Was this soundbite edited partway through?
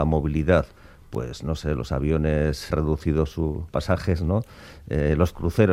yes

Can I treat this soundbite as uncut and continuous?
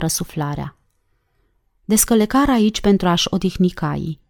yes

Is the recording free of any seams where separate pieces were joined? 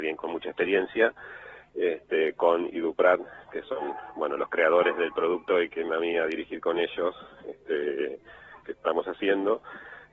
no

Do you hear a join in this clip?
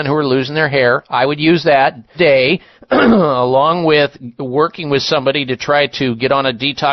yes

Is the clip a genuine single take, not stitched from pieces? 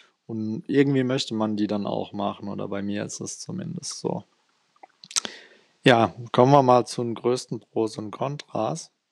yes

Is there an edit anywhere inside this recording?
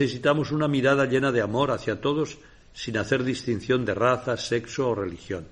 no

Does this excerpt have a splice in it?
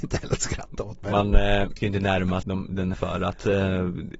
yes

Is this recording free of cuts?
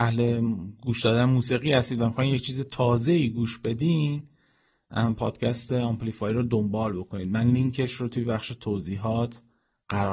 yes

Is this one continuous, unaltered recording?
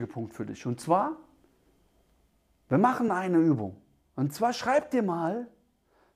yes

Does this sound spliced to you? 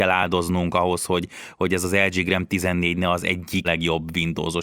yes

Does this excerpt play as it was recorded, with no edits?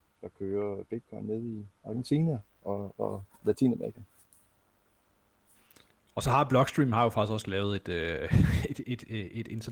yes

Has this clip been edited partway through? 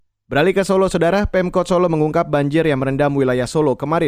no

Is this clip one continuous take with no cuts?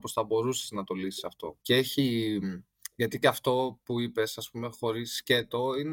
no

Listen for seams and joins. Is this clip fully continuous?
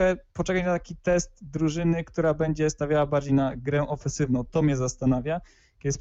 yes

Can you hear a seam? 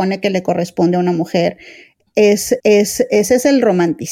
yes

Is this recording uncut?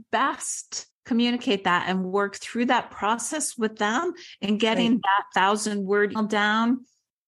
no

